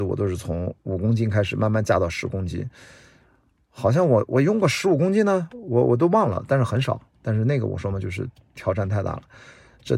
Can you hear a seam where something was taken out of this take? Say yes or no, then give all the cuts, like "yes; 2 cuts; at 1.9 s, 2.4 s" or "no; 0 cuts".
no; 0 cuts